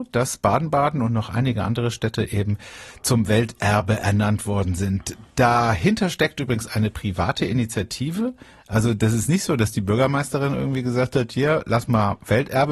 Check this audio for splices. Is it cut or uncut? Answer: uncut